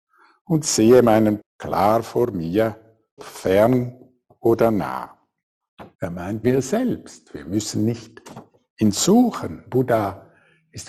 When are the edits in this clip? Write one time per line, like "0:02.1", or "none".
0:01.4
0:03.2
0:05.9
0:06.4